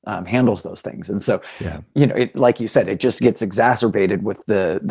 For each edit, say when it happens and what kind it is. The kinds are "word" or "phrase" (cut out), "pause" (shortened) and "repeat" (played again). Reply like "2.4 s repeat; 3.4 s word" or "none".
none

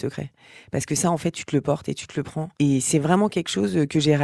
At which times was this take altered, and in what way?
2.5 s pause

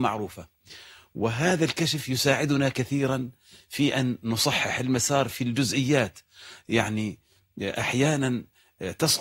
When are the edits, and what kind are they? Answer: none

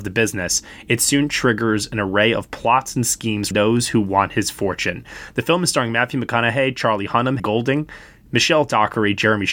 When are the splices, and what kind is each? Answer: 3.5 s word; 7.4 s word

